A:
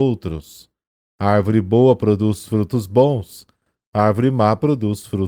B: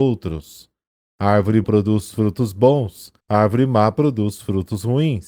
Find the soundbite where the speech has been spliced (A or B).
B